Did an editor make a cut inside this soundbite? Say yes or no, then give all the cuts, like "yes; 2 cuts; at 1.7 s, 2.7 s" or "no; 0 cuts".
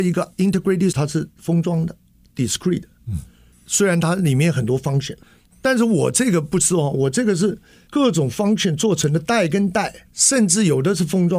yes; 2 cuts; at 0.9 s, 10.0 s